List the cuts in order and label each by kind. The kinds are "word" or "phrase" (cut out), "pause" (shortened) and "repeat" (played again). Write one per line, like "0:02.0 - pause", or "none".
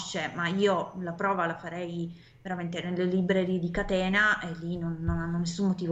none